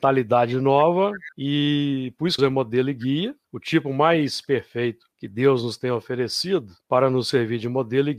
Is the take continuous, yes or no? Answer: no